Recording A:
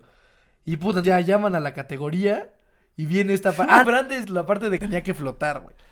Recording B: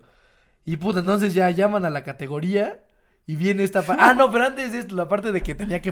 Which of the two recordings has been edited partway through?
A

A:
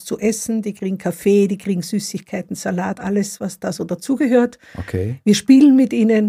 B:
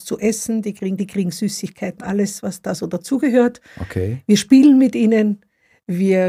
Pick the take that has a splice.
B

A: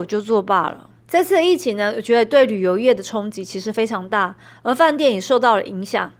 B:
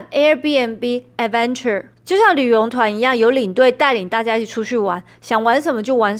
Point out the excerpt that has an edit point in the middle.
A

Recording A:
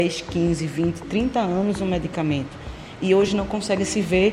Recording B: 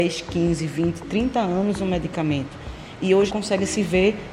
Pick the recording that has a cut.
B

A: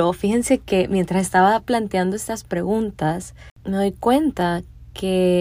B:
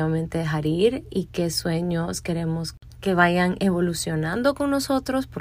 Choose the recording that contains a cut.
A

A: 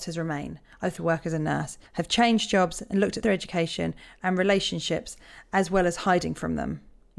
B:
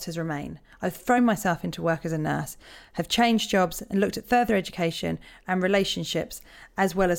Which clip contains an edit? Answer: A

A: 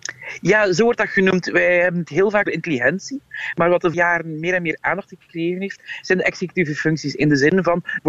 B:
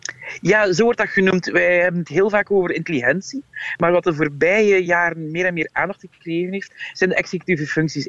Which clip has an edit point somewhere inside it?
A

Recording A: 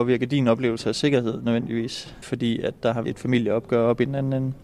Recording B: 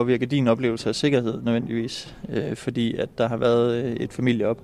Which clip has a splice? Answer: A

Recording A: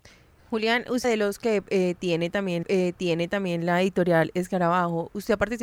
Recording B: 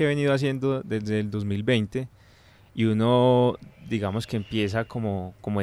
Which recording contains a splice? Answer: A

